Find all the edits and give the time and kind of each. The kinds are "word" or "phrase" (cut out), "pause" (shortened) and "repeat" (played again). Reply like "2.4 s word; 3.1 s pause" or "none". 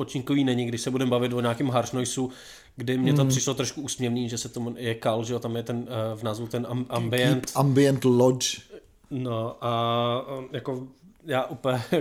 none